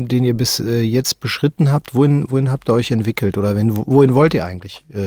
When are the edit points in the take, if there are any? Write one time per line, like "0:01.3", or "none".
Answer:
none